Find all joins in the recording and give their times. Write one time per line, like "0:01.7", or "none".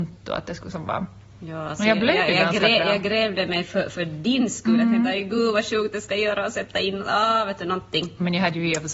none